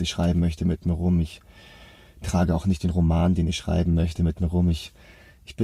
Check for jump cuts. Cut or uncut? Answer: uncut